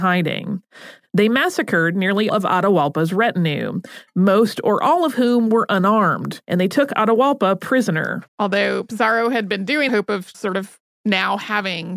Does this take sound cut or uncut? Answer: cut